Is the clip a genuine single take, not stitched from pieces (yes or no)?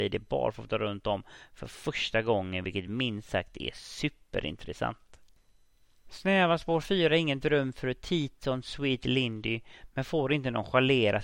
yes